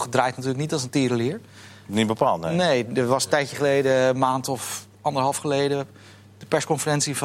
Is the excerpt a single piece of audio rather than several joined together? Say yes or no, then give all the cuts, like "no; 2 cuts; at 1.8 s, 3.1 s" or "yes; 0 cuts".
yes; 0 cuts